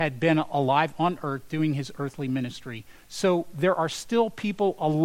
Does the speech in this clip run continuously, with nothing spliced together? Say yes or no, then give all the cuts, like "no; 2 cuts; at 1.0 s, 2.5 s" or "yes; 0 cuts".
yes; 0 cuts